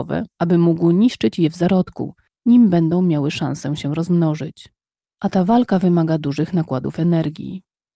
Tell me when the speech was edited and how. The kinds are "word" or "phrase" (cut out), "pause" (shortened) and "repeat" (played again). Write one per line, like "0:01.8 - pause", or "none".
none